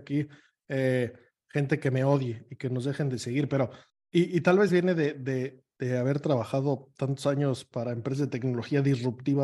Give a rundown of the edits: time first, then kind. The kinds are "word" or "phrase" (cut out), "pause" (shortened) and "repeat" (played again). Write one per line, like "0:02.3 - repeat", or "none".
none